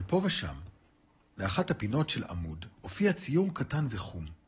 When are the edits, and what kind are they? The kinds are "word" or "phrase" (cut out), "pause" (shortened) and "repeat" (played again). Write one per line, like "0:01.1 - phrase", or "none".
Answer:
0:02.7 - pause